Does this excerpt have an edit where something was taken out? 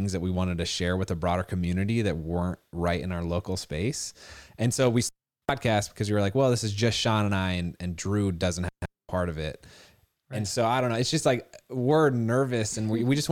no; 0 cuts

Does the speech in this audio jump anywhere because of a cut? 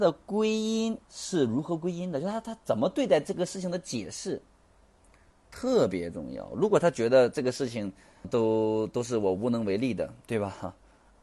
yes; 2 cuts; at 1.0 s, 8.2 s

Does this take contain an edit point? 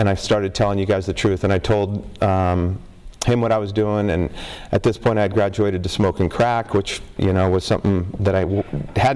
no; 0 cuts

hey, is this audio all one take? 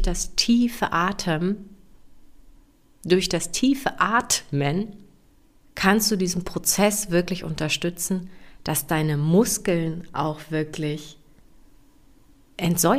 yes; 0 cuts

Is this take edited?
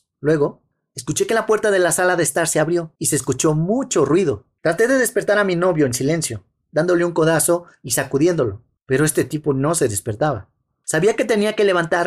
no; 0 cuts

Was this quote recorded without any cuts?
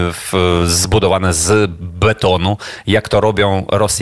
yes; 0 cuts

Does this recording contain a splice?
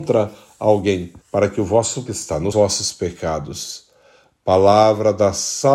yes; 3 cuts; at 1.2 s, 2.1 s, 2.5 s

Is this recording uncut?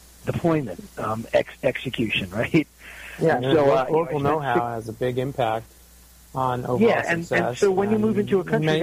yes; 0 cuts

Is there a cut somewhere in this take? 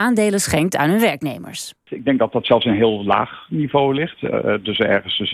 no; 0 cuts

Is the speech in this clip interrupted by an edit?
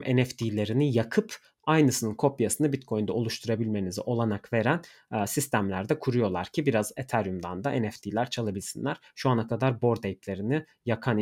no; 0 cuts

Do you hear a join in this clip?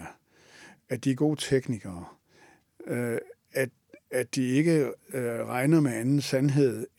no; 0 cuts

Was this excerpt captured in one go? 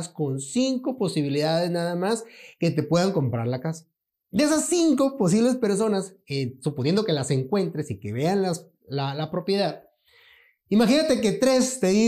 yes; 0 cuts

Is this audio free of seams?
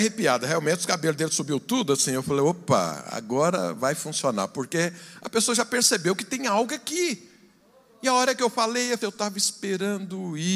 no; 1 cut; at 9.0 s

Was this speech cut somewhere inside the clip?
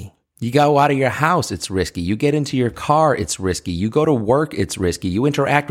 no; 0 cuts

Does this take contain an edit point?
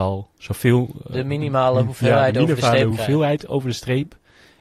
no; 0 cuts

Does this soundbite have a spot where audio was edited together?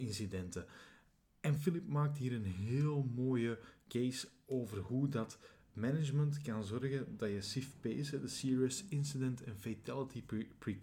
no; 0 cuts

